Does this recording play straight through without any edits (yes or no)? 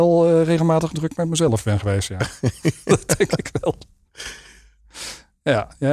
no